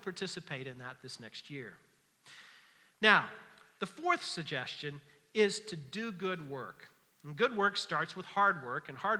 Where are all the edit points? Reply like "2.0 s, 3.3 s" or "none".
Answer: none